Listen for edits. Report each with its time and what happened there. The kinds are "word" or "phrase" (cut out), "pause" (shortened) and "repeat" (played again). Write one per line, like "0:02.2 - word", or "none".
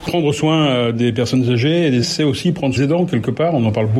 0:02.0 - word
0:02.8 - phrase

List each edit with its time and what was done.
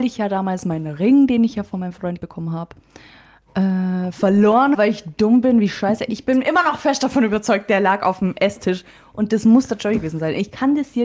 0:02.2 - word
0:04.7 - word

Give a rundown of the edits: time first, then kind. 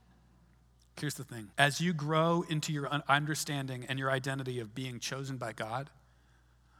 0:01.5 - pause

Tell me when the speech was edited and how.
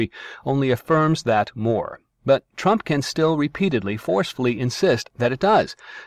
none

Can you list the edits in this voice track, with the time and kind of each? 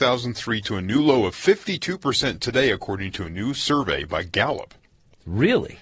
none

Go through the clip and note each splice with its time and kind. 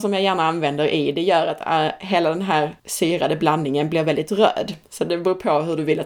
0:02.8 - pause

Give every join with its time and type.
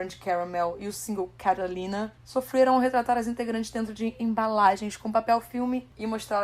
none

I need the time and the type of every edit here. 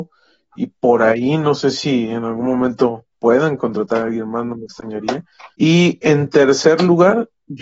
0:03.1 - pause
0:05.5 - pause

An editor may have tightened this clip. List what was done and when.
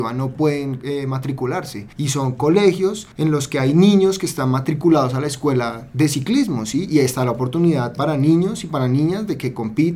0:01.9 - pause

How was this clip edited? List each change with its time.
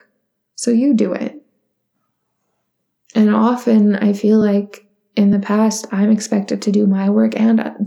none

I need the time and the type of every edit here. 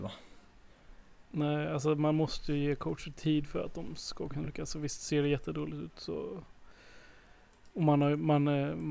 0:01.2 - pause

